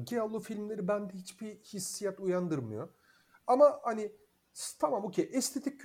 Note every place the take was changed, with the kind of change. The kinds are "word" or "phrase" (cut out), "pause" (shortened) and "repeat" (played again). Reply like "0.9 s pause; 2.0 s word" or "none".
none